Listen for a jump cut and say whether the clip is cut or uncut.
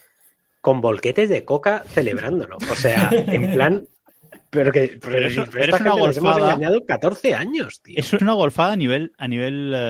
cut